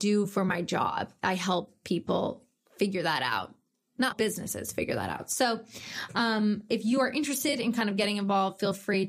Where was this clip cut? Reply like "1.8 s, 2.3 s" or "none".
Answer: 4.1 s